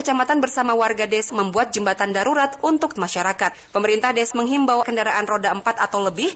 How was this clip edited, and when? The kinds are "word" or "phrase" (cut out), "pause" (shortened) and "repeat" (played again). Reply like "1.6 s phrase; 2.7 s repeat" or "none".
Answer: 1.3 s word; 3.0 s word; 4.3 s word; 4.8 s word